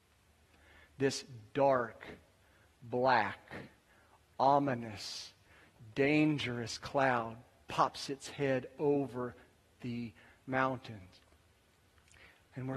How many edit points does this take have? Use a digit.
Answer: 0